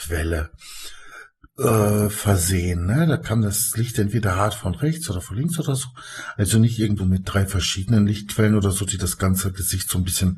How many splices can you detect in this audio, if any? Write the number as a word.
one